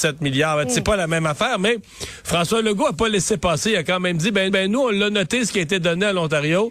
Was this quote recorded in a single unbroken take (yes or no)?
no